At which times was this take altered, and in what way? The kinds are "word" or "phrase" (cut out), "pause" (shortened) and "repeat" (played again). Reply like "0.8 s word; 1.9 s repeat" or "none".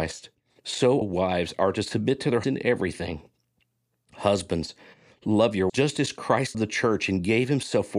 1.0 s word; 2.4 s word; 5.7 s word; 6.5 s word

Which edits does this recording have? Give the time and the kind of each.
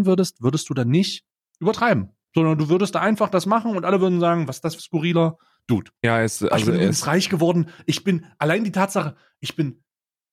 1.3 s pause; 4.8 s phrase; 5.9 s pause

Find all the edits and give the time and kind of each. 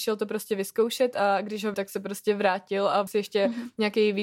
1.7 s word; 3.1 s word

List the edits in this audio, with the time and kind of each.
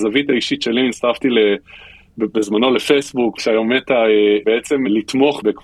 3.4 s word

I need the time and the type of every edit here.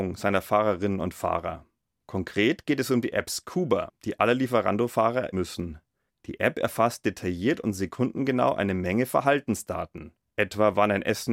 5.3 s word

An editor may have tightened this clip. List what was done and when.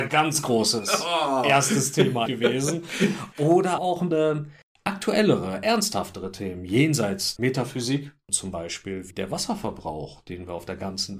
2.3 s word; 3.8 s word; 4.1 s word; 4.6 s pause; 7.4 s word; 9.1 s word

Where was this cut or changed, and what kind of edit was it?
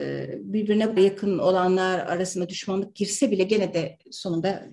1.0 s word

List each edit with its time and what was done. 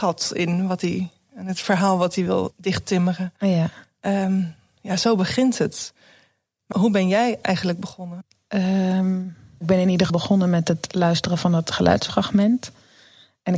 6.7 s word; 10.1 s word

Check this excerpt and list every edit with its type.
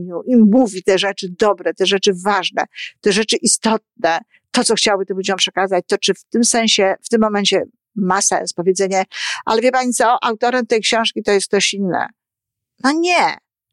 none

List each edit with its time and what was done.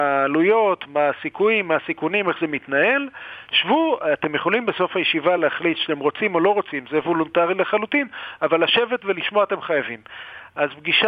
none

